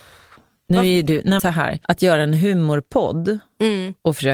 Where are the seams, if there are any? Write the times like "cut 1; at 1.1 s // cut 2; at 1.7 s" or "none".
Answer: cut 1; at 1.4 s // cut 2; at 1.8 s